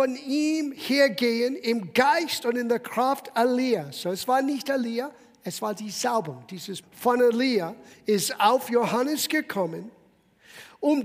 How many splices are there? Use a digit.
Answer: 1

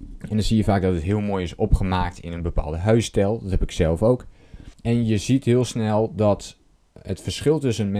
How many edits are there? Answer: 1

